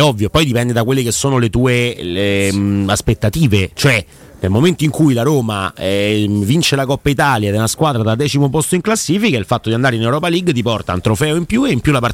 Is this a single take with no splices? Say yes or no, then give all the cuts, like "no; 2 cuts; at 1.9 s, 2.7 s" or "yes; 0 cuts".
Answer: yes; 0 cuts